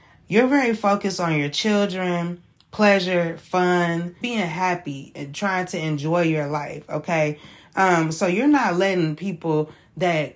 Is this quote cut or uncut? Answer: cut